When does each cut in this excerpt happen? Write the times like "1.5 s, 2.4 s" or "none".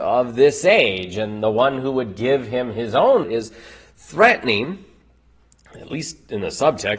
3.2 s